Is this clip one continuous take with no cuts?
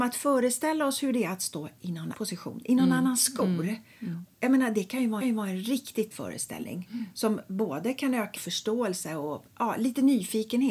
no; 4 cuts; at 2.1 s, 5.2 s, 6.1 s, 8.4 s

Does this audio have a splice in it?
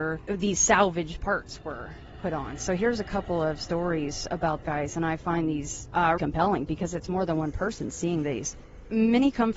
yes; 2 cuts; at 4.6 s, 6.2 s

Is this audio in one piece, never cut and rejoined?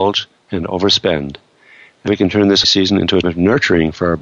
no; 3 cuts; at 2.1 s, 2.6 s, 3.2 s

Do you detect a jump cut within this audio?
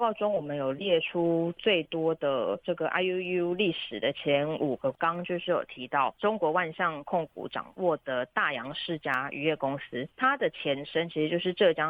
no; 0 cuts

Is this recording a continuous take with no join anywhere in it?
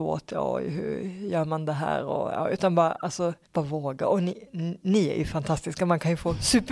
no; 1 cut; at 3.4 s

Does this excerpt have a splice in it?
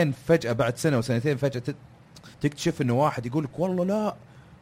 yes; 1 cut; at 2.3 s

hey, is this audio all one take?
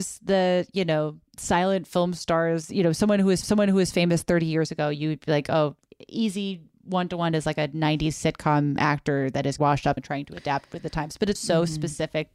no; 5 cuts; at 1.3 s, 3.4 s, 9.6 s, 10.0 s, 11.4 s

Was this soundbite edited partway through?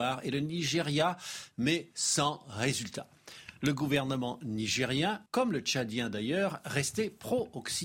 yes; 1 cut; at 5.3 s

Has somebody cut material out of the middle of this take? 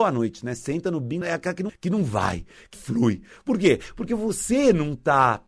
yes; 3 cuts; at 1.2 s, 1.7 s, 2.7 s

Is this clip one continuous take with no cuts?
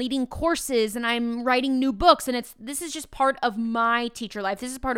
yes; 0 cuts

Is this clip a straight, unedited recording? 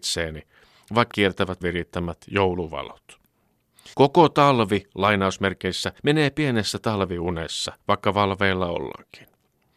no; 5 cuts; at 1.1 s, 1.6 s, 3.9 s, 6.0 s, 7.8 s

